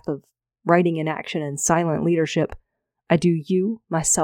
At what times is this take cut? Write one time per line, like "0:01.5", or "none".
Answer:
none